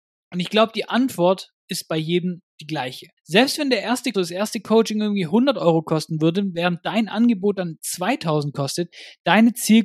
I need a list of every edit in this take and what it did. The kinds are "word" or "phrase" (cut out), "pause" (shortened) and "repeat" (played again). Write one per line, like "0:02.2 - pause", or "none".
0:03.2 - pause
0:04.1 - word